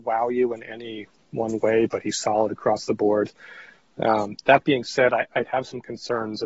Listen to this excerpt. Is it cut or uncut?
uncut